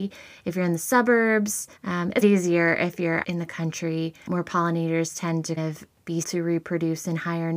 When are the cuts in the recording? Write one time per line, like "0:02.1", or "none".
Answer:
0:01.8
0:02.2
0:03.2
0:05.6
0:06.2